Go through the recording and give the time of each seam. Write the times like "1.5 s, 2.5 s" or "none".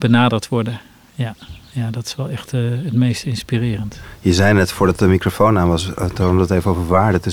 none

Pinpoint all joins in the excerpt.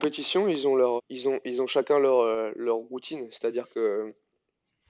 1.0 s

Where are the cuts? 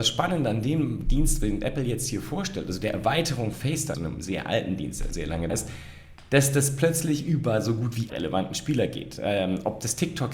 3.5 s, 3.9 s, 5.1 s, 5.5 s, 8.1 s

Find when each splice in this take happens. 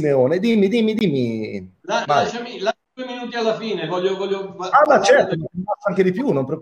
2.8 s

